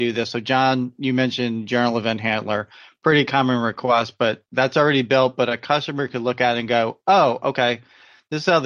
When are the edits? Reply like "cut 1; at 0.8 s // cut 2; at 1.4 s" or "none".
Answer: none